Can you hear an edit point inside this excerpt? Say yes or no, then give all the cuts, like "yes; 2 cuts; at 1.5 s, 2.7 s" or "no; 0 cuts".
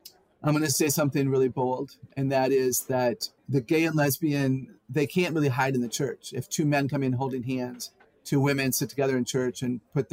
yes; 2 cuts; at 3.4 s, 8.0 s